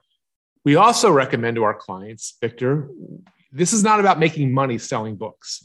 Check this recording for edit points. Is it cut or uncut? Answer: uncut